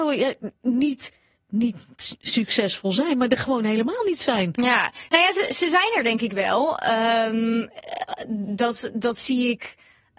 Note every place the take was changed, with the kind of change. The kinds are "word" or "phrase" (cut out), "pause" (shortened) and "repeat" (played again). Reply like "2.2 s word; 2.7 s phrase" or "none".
none